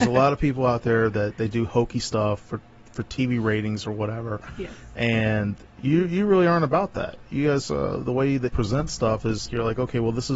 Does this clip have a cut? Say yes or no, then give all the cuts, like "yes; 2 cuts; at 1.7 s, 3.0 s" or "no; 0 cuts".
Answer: yes; 2 cuts; at 8.5 s, 9.5 s